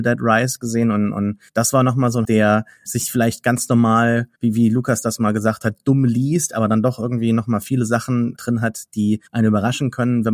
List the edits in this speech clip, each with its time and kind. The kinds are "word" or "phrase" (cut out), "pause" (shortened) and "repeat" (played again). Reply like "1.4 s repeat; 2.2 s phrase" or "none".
1.5 s pause; 2.2 s word; 2.9 s word; 4.4 s pause; 8.4 s word; 9.3 s pause